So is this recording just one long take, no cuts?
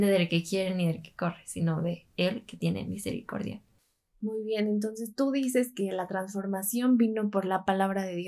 yes; 0 cuts

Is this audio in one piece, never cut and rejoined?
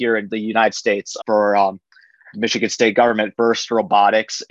no; 2 cuts; at 1.2 s, 3.3 s

